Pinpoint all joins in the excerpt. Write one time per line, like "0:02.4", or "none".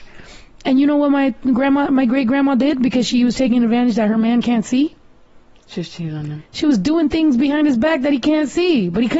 none

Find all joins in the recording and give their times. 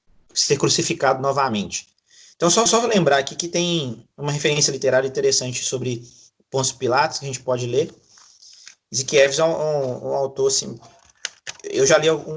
0:02.7

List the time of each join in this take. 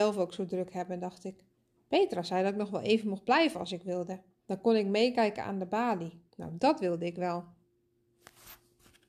0:01.6
0:04.4
0:06.3

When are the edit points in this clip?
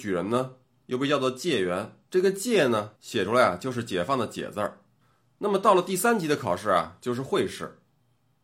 0:02.0
0:02.9
0:05.0

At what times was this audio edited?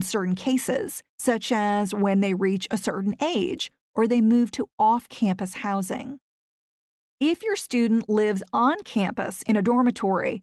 0:01.1

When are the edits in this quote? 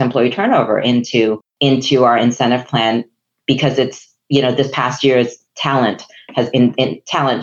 0:01.5
0:05.4
0:06.5

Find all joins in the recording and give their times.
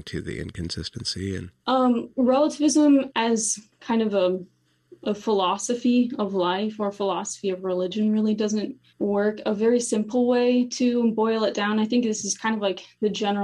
0:01.6
0:08.9

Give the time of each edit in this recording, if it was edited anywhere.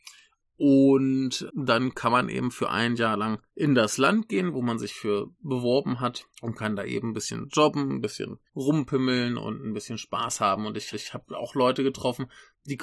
0:01.5
0:03.5
0:06.3
0:08.5
0:10.9

